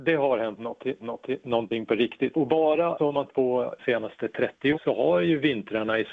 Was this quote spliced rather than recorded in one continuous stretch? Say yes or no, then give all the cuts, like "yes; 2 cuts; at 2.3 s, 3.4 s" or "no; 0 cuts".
yes; 6 cuts; at 1.0 s, 2.3 s, 3.0 s, 3.3 s, 3.8 s, 4.7 s